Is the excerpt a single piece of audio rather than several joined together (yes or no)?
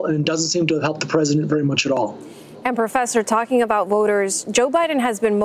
yes